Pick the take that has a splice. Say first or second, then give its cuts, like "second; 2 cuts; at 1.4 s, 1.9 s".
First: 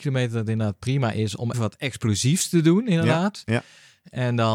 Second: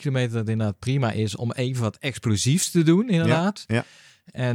first; 1 cut; at 1.5 s